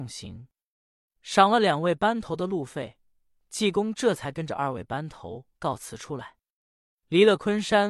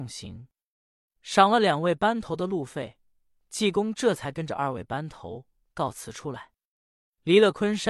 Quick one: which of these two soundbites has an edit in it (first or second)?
first